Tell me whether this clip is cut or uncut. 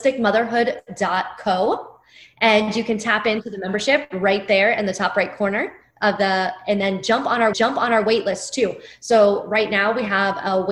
cut